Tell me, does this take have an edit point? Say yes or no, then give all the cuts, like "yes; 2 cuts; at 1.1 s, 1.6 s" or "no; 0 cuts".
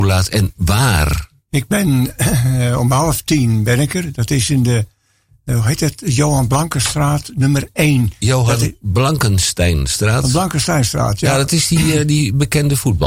no; 0 cuts